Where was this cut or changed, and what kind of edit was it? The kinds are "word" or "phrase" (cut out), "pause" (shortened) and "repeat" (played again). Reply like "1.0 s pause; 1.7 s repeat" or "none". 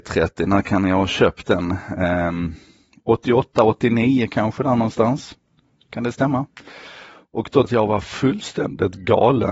7.6 s phrase